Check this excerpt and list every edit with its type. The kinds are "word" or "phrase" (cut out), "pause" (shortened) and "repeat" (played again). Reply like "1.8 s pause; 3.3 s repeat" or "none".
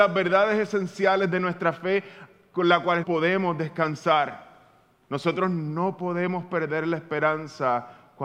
3.0 s word

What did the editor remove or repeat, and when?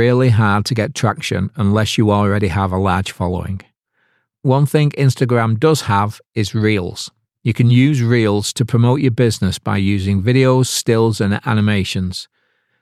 none

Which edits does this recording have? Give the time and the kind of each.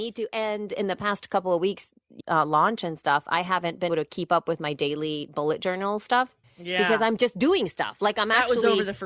2.2 s phrase; 3.9 s word; 6.4 s pause

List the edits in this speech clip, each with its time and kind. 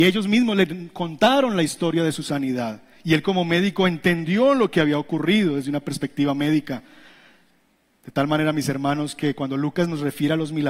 none

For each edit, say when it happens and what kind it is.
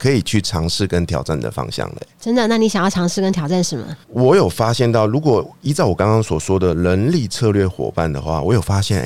4.0 s pause

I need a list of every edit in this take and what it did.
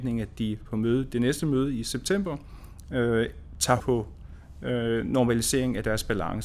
3.8 s word

